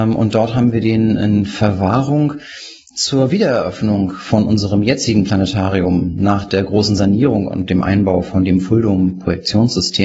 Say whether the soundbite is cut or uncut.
uncut